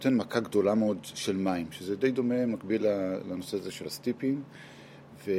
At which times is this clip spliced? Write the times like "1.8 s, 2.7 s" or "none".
none